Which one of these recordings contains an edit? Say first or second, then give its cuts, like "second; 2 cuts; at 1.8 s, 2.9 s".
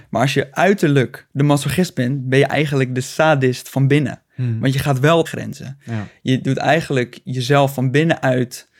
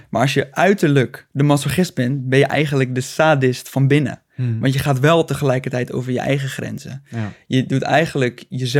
first; 1 cut; at 5.3 s